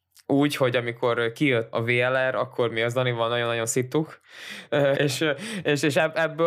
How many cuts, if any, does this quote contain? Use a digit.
2